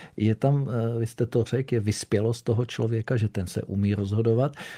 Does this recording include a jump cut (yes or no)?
no